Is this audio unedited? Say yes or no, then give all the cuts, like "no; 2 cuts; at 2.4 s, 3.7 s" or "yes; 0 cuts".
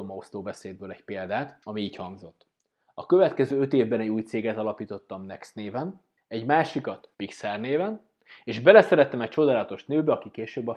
no; 2 cuts; at 6.2 s, 7.1 s